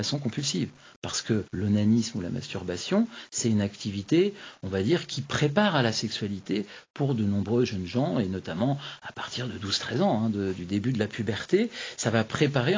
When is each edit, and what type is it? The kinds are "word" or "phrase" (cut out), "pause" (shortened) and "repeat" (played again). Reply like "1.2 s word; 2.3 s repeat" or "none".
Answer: 1.5 s pause